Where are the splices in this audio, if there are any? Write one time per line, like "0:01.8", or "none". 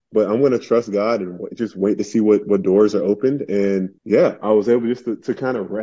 0:04.0